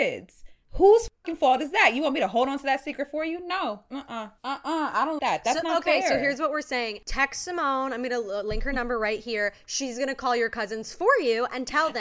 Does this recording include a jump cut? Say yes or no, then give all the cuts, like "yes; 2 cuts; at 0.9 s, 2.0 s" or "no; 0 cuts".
yes; 1 cut; at 5.2 s